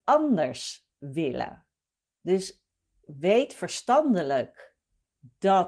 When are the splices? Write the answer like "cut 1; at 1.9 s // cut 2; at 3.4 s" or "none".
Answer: cut 1; at 3.0 s

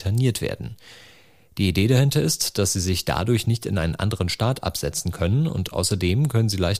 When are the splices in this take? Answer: none

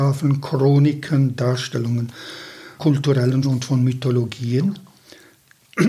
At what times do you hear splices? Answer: cut 1; at 2.8 s // cut 2; at 3.4 s

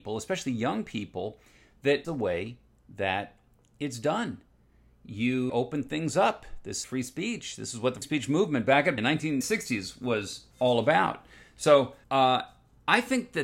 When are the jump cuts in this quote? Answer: cut 1; at 2.0 s // cut 2; at 5.5 s // cut 3; at 6.8 s // cut 4; at 8.0 s // cut 5; at 9.0 s // cut 6; at 9.4 s // cut 7; at 10.5 s // cut 8; at 12.0 s

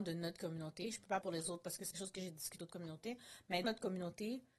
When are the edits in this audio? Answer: cut 1; at 1.2 s // cut 2; at 1.9 s // cut 3; at 2.6 s // cut 4; at 3.6 s

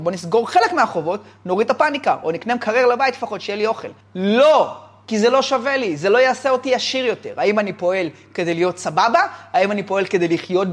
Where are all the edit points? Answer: none

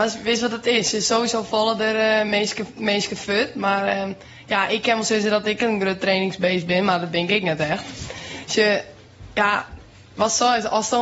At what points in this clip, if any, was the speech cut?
none

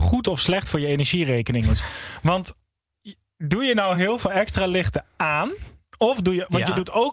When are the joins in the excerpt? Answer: none

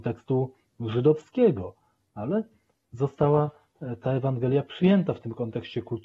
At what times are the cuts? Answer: none

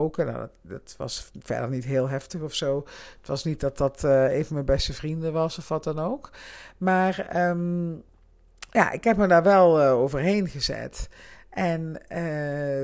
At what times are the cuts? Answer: none

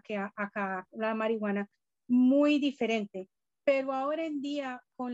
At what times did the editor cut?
none

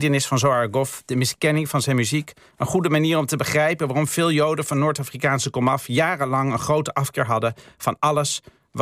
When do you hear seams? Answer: none

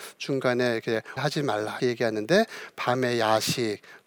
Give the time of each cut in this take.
cut 1; at 1.2 s // cut 2; at 1.8 s

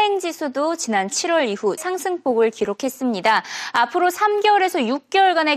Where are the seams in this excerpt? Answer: cut 1; at 1.8 s

